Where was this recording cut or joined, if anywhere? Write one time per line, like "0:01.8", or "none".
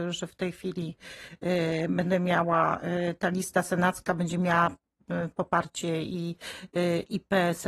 none